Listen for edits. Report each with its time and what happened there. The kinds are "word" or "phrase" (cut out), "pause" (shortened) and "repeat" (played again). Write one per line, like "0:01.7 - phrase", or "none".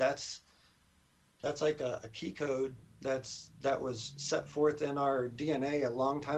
none

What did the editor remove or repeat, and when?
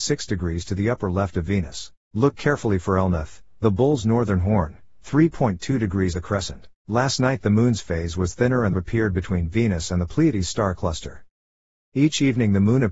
0:02.0 - pause
0:06.1 - word
0:06.8 - pause
0:08.7 - phrase

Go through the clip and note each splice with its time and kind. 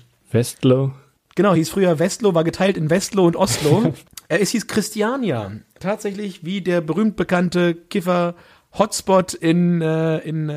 none

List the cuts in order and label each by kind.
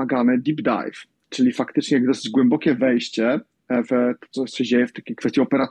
none

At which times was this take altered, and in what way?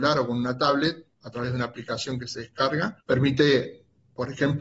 0:01.1 - pause
0:03.0 - pause

